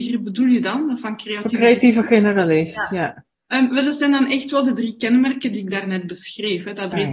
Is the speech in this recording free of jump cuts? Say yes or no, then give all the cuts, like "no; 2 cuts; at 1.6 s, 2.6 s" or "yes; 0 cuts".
yes; 0 cuts